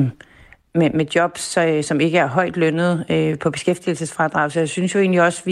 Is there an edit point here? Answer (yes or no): no